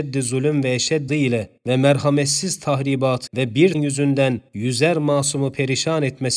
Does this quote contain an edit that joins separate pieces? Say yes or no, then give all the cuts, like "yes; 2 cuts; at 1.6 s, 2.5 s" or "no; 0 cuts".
yes; 5 cuts; at 1.1 s, 1.6 s, 3.3 s, 3.7 s, 4.5 s